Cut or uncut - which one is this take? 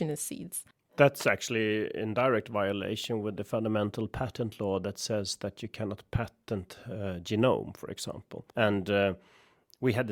cut